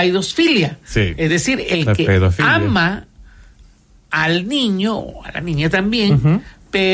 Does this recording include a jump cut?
no; 0 cuts

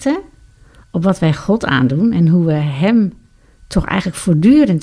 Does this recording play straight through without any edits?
yes; 0 cuts

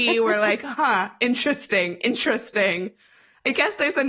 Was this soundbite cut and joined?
no; 0 cuts

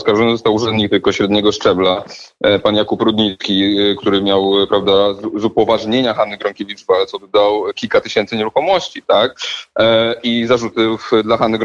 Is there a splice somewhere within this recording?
no; 0 cuts

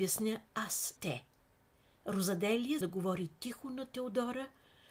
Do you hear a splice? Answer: yes; 2 cuts; at 1.0 s, 2.8 s

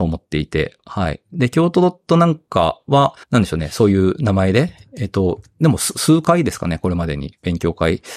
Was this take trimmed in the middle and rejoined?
yes; 1 cut; at 3.2 s

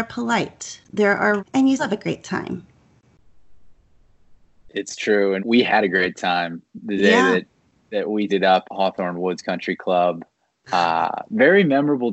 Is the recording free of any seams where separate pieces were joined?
no; 5 cuts; at 1.4 s, 1.8 s, 5.4 s, 8.3 s, 8.6 s

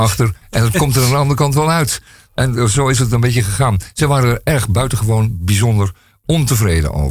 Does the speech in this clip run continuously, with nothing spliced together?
yes; 0 cuts

